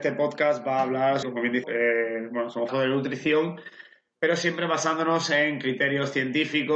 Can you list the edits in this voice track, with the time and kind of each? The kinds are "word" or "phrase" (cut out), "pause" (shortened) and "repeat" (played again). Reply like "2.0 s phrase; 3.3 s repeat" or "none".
1.2 s word; 1.6 s phrase; 2.7 s phrase